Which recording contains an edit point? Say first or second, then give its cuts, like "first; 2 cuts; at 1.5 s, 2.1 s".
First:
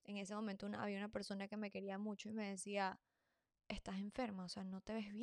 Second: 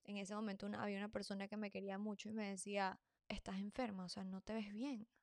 second; 1 cut; at 3.2 s